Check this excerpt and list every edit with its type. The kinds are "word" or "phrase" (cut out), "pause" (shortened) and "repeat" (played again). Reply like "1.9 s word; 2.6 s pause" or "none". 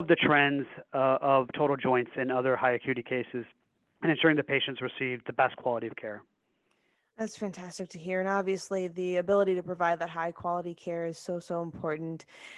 none

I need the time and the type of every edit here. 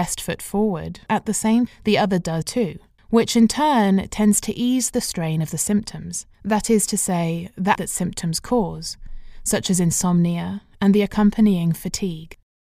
1.1 s word; 1.7 s word; 2.4 s word; 3.0 s pause; 6.3 s pause; 7.7 s word

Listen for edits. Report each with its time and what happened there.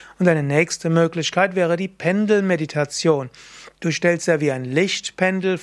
3.8 s pause

